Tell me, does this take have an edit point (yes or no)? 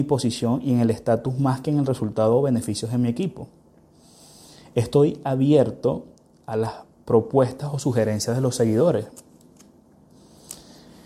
no